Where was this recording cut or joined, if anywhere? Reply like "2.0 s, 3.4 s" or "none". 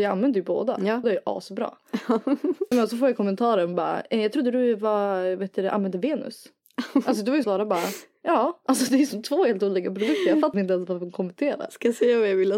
1.0 s, 2.7 s, 7.4 s, 10.5 s